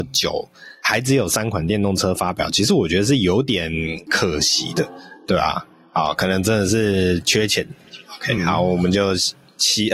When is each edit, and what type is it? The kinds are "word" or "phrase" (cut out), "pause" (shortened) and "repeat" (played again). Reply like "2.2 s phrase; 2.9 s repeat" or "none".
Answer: none